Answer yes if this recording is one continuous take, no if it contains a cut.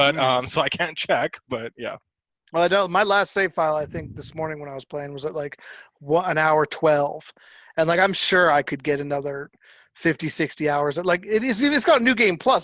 yes